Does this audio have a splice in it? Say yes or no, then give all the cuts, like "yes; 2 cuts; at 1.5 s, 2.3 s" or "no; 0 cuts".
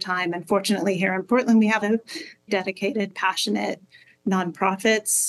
yes; 3 cuts; at 1.8 s, 2.5 s, 3.1 s